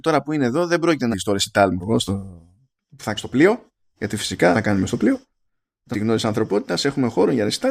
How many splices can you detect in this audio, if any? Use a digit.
5